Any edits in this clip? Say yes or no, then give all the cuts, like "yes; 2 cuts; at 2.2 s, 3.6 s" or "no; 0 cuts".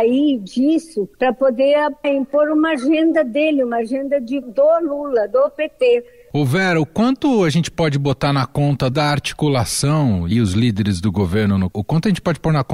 yes; 6 cuts; at 1.1 s, 2.0 s, 4.4 s, 8.9 s, 10.3 s, 11.7 s